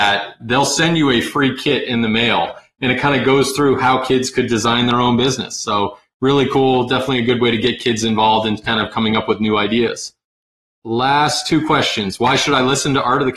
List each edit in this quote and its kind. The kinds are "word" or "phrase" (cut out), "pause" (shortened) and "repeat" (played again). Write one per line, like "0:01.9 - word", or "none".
none